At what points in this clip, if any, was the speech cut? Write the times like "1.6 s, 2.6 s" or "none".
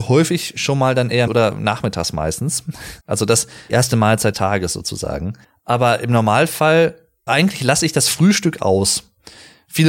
1.3 s, 3.0 s, 3.7 s, 4.3 s, 5.4 s, 7.3 s